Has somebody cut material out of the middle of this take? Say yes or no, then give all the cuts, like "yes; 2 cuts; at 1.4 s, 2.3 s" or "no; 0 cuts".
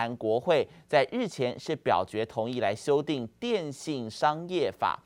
no; 0 cuts